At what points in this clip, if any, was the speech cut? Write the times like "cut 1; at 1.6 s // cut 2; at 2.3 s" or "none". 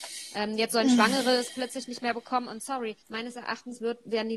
cut 1; at 3.0 s